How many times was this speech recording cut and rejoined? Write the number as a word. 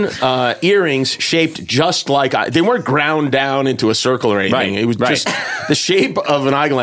zero